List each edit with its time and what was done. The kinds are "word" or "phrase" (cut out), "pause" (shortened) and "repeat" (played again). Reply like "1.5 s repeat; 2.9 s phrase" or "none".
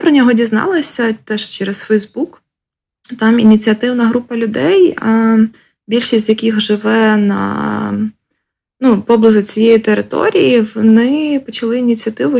none